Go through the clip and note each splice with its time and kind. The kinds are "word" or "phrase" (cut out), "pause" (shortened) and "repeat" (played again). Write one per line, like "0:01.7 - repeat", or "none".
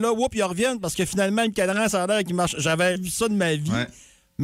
0:03.0 - word